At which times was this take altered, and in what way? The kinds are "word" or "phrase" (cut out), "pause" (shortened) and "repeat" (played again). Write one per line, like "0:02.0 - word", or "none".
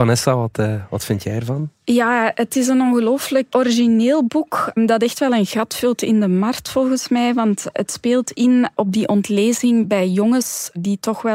0:03.5 - word